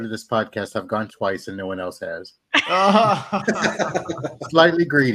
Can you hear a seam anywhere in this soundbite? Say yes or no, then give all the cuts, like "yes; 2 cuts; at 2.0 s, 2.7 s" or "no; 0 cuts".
yes; 1 cut; at 1.1 s